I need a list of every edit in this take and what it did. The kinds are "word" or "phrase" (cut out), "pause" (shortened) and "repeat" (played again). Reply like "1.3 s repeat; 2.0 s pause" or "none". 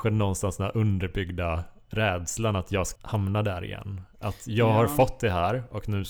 3.0 s word